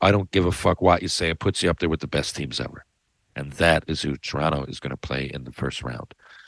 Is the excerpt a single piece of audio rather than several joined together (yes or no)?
yes